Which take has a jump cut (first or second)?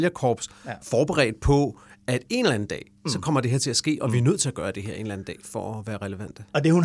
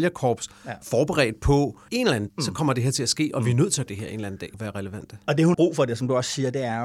second